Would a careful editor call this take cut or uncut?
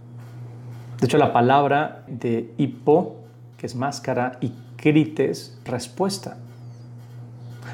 cut